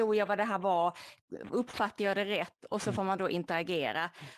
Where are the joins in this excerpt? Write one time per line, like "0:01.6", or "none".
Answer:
none